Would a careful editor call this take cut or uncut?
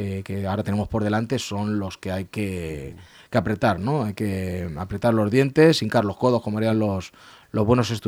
uncut